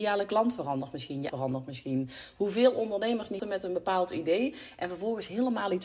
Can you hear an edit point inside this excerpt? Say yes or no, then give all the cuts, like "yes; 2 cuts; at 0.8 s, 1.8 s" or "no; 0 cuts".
yes; 2 cuts; at 1.3 s, 3.4 s